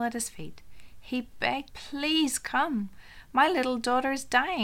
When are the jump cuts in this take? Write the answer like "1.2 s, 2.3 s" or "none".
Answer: 1.7 s